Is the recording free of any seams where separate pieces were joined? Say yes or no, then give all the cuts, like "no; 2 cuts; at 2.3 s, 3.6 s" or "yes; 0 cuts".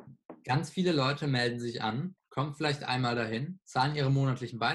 yes; 0 cuts